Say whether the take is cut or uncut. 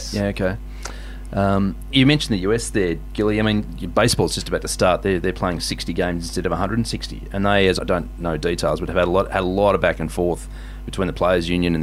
cut